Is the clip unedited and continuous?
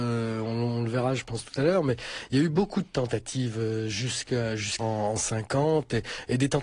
no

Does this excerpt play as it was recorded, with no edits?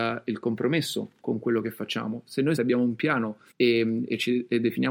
no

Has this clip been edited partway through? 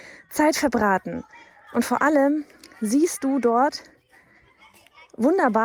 no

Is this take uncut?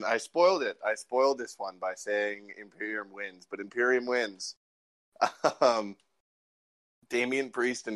yes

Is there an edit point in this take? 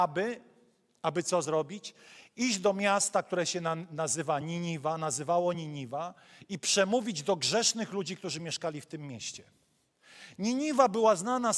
no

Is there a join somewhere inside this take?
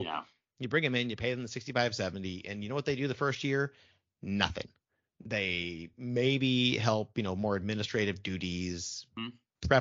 no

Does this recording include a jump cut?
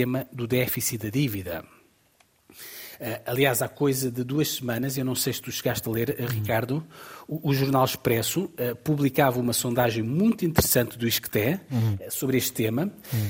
no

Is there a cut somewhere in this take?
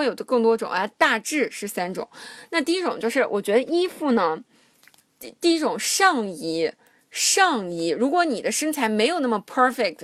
no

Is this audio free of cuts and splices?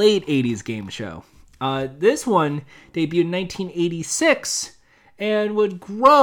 yes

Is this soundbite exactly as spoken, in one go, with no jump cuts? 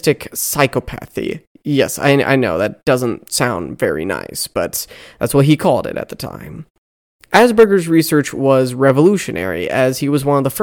yes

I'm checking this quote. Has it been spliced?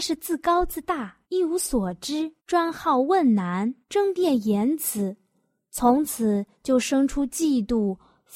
yes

